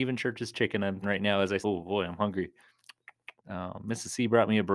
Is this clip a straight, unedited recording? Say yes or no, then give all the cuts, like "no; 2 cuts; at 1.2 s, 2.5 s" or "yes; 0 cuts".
no; 3 cuts; at 1.0 s, 1.6 s, 3.4 s